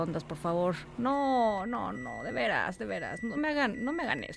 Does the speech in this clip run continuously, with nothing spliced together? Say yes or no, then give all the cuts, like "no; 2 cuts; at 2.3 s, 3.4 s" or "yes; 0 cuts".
no; 2 cuts; at 1.9 s, 3.4 s